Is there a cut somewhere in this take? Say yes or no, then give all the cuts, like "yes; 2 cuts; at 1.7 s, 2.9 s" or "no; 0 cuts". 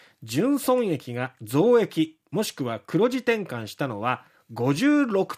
no; 0 cuts